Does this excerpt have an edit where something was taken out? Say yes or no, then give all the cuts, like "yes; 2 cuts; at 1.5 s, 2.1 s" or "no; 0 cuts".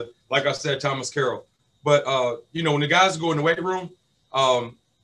no; 0 cuts